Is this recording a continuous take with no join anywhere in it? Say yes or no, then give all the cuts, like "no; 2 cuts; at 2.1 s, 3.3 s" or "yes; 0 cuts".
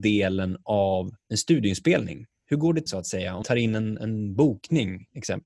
no; 3 cuts; at 1.2 s, 2.9 s, 3.4 s